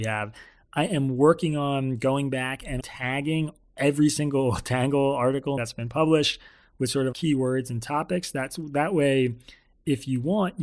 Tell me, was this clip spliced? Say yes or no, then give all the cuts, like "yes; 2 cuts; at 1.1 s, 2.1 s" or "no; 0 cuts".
yes; 3 cuts; at 2.8 s, 5.6 s, 7.1 s